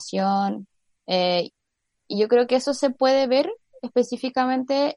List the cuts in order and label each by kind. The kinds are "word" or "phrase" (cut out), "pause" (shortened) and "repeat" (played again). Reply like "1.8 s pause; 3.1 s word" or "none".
none